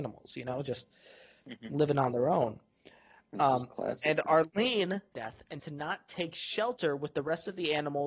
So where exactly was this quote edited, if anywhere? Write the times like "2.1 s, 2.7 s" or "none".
5.1 s, 5.6 s